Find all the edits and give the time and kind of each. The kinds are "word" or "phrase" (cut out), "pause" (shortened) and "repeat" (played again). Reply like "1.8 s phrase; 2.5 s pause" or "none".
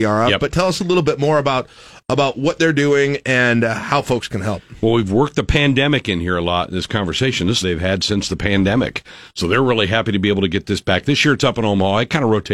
3.2 s word; 7.6 s phrase